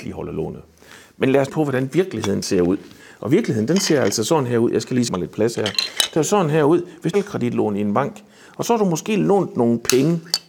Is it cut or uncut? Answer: cut